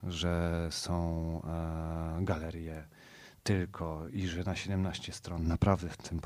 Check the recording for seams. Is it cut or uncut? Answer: uncut